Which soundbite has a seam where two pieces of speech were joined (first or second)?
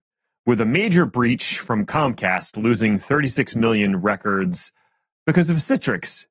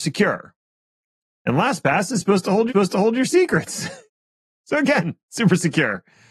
second